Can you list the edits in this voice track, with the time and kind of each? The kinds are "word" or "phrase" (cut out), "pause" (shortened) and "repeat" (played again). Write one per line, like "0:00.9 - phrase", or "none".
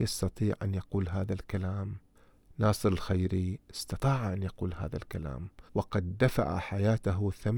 0:05.7 - pause